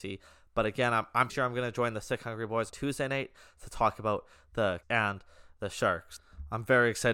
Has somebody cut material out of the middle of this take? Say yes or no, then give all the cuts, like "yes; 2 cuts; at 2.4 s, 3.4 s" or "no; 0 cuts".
yes; 3 cuts; at 1.3 s, 2.7 s, 4.8 s